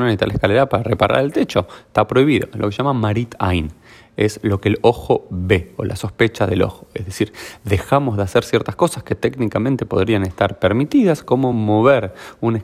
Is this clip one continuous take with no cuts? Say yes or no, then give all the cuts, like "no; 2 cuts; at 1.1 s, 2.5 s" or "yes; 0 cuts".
yes; 0 cuts